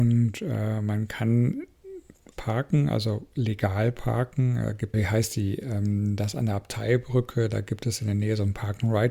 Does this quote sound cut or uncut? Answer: cut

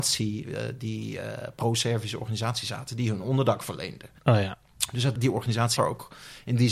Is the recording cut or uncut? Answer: cut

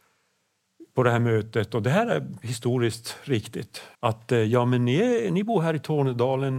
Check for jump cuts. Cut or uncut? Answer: cut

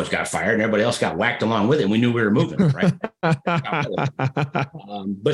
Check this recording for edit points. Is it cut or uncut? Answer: uncut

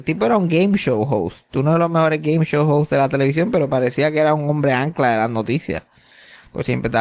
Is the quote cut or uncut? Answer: uncut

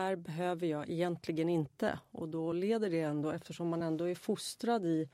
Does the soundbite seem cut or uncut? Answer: uncut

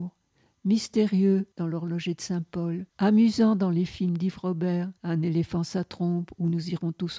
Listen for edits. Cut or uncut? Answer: cut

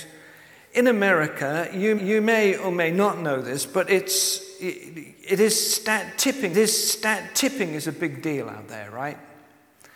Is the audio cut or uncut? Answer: cut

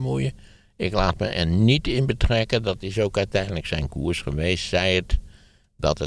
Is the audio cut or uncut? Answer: uncut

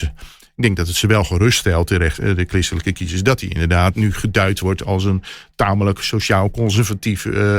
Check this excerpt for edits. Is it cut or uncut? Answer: uncut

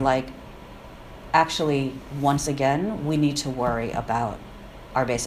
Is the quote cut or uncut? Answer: uncut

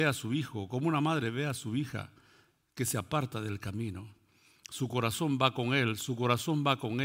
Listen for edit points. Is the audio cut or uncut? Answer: uncut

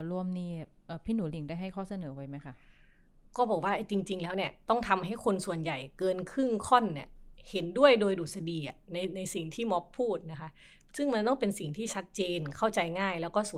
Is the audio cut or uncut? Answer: uncut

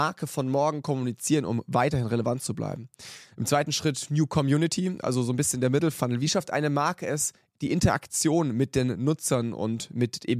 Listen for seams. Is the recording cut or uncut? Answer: uncut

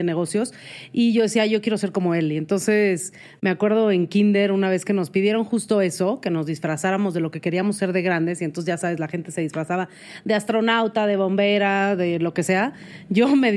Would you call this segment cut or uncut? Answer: uncut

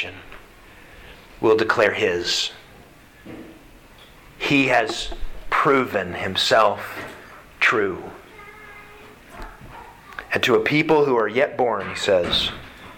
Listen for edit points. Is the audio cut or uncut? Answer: uncut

